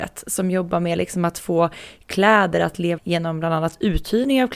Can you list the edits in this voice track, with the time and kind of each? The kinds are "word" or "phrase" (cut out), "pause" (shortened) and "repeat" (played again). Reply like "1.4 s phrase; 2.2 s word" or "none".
3.0 s word